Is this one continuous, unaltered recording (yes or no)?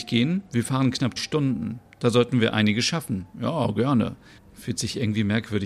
no